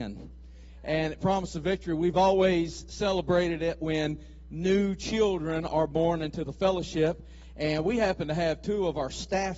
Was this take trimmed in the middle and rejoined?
no; 0 cuts

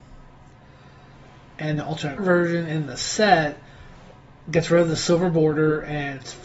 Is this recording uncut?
no; 2 cuts; at 1.8 s, 2.2 s

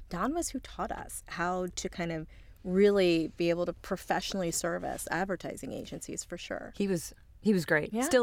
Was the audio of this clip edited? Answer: no; 0 cuts

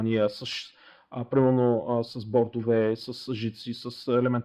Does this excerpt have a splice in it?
no; 0 cuts

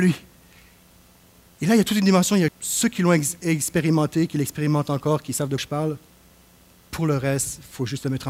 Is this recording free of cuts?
no; 2 cuts; at 2.5 s, 5.6 s

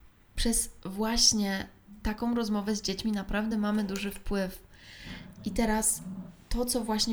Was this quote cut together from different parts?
no; 0 cuts

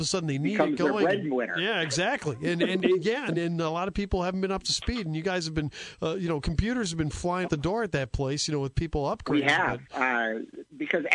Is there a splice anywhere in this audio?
yes; 2 cuts; at 3.3 s, 7.4 s

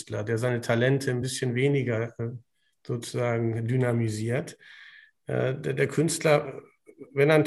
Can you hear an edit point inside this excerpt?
no; 0 cuts

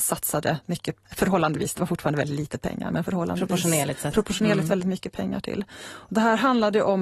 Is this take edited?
yes; 1 cut; at 1.0 s

